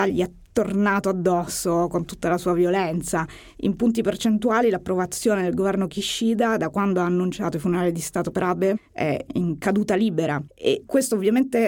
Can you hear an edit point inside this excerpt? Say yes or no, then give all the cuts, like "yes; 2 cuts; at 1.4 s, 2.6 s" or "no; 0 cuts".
no; 0 cuts